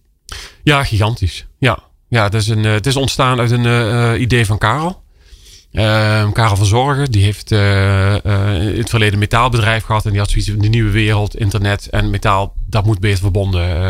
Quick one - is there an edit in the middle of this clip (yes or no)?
no